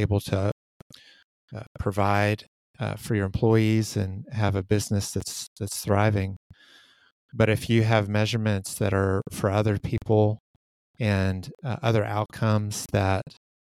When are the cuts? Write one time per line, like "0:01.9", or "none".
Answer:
none